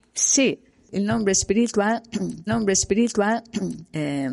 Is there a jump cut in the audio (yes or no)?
yes